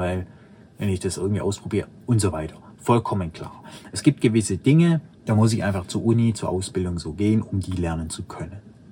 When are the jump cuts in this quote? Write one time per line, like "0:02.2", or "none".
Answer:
0:05.1